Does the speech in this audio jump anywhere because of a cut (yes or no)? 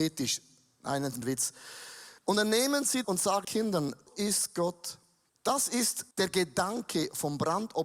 yes